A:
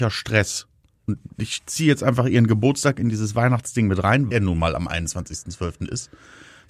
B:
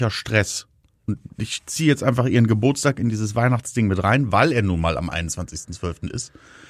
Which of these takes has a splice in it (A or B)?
A